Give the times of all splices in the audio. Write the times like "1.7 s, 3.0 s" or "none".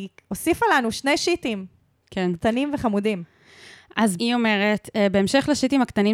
4.2 s